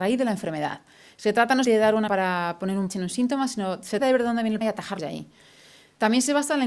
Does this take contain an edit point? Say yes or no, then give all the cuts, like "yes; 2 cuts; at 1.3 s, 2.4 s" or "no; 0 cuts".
yes; 6 cuts; at 1.6 s, 2.1 s, 2.9 s, 4.0 s, 4.6 s, 5.0 s